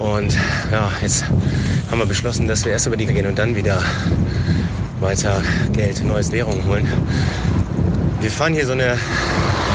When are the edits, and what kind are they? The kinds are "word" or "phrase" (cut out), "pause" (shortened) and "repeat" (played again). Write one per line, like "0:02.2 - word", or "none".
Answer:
0:03.1 - word
0:06.3 - word

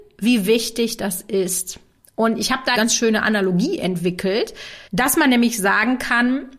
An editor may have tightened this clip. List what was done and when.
0:02.7 - phrase
0:04.9 - pause

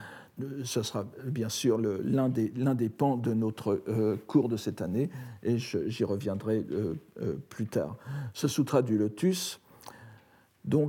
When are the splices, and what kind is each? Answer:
none

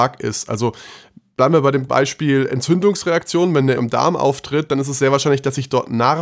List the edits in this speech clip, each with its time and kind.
0:01.9 - word
0:03.8 - word

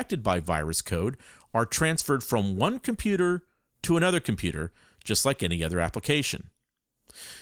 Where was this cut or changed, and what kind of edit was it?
none

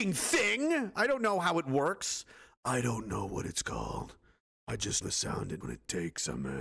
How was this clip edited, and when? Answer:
0:05.0 - word
0:05.6 - word

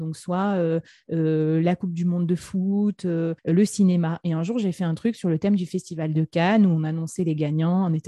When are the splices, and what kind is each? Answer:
0:03.4 - pause

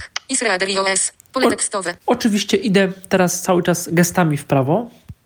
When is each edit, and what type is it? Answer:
0:02.0 - pause

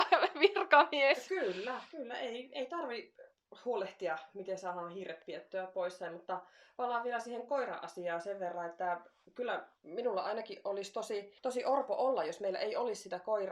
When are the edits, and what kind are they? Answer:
0:11.4 - pause

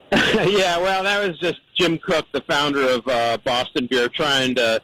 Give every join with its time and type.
0:01.7 - word

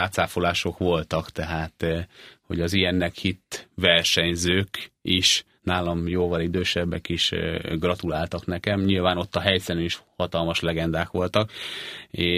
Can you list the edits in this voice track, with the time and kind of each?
none

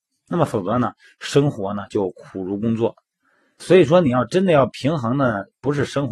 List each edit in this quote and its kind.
0:03.6 - word

